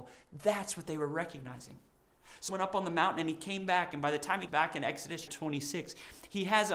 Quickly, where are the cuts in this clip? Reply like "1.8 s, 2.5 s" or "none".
2.5 s, 4.5 s, 5.3 s

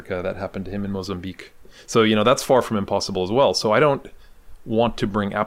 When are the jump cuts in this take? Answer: none

